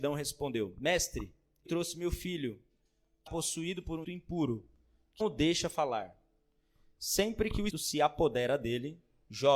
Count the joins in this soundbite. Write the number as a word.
five